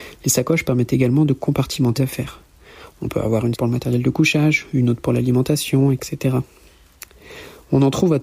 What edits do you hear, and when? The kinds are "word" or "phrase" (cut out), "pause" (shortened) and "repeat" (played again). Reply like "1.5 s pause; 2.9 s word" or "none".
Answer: 2.0 s word; 3.5 s word